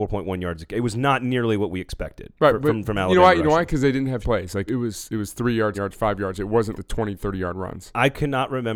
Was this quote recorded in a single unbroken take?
no; 4 cuts; at 4.2 s, 4.7 s, 5.7 s, 6.7 s

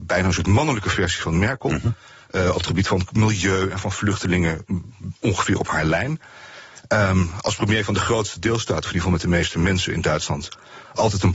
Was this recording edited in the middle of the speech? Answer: no; 0 cuts

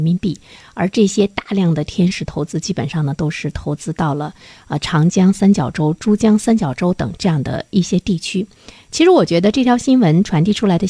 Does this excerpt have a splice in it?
no; 0 cuts

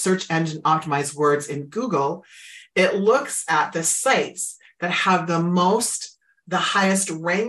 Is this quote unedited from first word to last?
yes; 0 cuts

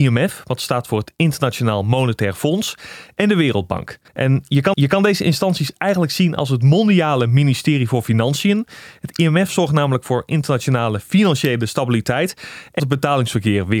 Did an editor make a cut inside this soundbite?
yes; 3 cuts; at 4.1 s, 4.7 s, 12.8 s

